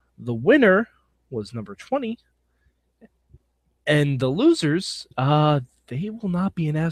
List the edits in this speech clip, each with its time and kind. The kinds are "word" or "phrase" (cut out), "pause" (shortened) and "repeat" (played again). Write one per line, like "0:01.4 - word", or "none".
none